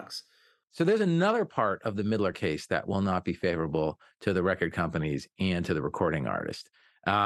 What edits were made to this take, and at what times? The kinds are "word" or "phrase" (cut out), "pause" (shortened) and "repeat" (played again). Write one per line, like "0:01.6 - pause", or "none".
none